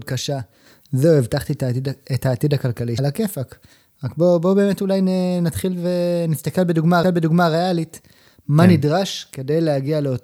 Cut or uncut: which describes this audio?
cut